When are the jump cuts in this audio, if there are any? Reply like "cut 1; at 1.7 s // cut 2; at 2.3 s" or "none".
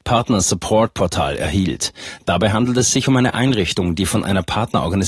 none